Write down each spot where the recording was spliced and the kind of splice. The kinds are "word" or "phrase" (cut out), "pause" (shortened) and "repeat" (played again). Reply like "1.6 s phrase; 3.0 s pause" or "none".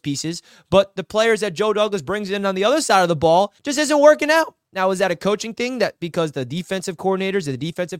3.6 s pause